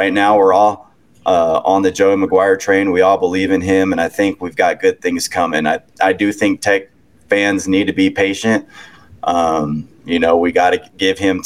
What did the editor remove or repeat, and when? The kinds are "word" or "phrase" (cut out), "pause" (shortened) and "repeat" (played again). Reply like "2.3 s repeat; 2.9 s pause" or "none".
none